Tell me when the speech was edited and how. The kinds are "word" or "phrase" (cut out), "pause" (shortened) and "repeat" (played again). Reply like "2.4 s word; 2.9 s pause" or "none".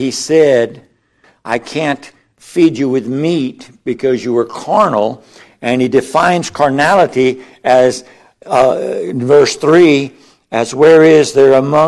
none